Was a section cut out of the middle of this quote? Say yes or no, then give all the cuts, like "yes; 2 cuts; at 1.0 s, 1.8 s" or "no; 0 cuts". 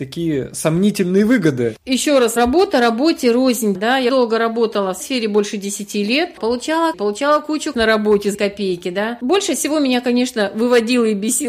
yes; 8 cuts; at 2.4 s, 3.7 s, 4.1 s, 5.0 s, 6.4 s, 6.9 s, 7.7 s, 8.3 s